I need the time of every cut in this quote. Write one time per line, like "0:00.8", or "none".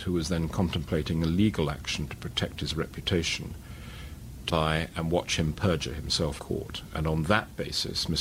0:04.5
0:06.4